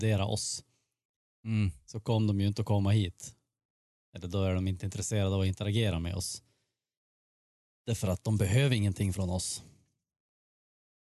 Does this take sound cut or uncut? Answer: uncut